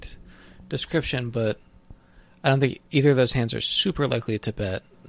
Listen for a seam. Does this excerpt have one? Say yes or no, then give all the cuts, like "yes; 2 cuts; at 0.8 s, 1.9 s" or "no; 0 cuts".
no; 0 cuts